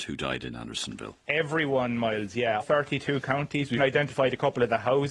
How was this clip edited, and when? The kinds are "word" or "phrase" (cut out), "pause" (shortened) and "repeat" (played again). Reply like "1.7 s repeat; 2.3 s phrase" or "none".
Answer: 1.2 s pause; 2.6 s word; 3.8 s word